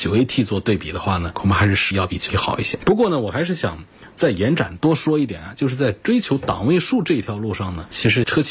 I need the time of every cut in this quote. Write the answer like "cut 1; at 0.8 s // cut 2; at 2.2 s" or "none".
cut 1; at 1.9 s // cut 2; at 2.3 s